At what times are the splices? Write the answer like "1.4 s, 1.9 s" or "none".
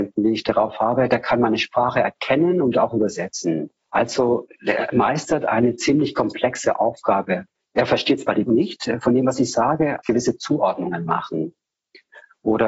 3.8 s, 7.5 s, 8.5 s, 10.0 s